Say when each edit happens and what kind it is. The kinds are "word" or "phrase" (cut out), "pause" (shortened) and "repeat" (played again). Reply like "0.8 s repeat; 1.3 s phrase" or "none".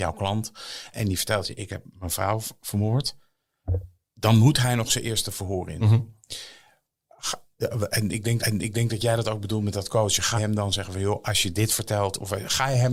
0.9 s word; 8.4 s repeat; 10.4 s word